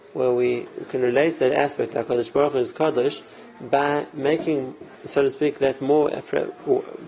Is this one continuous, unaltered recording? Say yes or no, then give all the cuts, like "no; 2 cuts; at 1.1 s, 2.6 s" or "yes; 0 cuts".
no; 1 cut; at 4.9 s